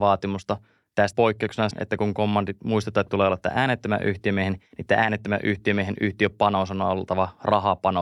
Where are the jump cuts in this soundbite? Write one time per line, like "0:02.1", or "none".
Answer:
0:01.1
0:01.7
0:03.1
0:04.7

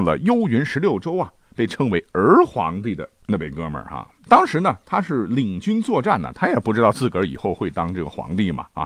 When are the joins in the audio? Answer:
0:04.2

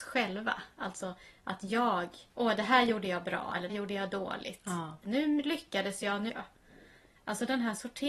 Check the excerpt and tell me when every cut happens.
0:02.3
0:03.7
0:06.3

